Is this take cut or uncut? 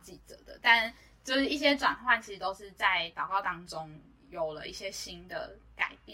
uncut